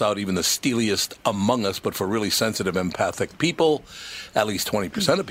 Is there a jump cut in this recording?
no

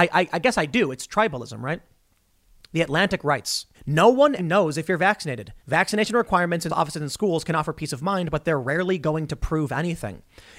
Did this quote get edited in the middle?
yes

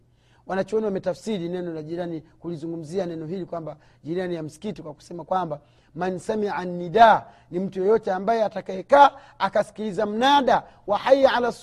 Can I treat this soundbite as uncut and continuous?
yes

